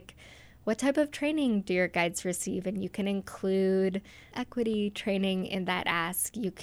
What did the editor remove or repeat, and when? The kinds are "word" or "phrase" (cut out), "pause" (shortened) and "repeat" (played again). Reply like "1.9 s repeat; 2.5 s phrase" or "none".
none